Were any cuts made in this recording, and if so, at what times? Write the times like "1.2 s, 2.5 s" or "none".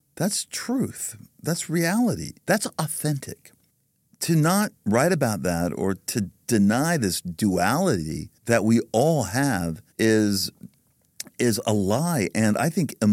2.4 s, 3.7 s, 4.8 s, 8.4 s, 9.9 s